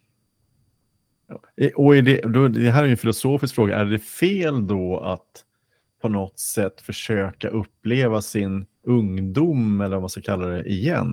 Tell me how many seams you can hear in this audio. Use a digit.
2